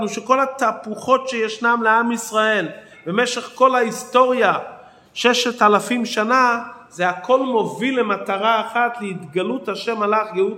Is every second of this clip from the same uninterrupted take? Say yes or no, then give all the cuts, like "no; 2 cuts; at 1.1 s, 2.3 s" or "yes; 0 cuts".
yes; 0 cuts